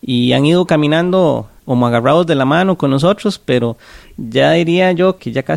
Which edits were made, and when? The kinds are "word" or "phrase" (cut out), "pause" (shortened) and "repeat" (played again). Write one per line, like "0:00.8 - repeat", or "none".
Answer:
0:01.6 - pause